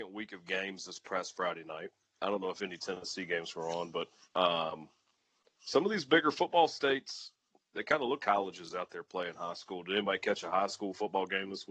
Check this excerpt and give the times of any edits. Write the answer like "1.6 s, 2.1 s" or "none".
4.2 s, 8.2 s